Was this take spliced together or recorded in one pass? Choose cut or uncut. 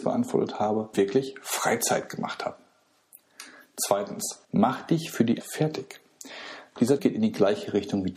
cut